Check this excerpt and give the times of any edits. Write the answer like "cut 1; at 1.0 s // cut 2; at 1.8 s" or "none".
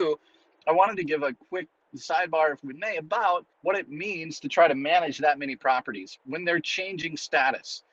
cut 1; at 3.5 s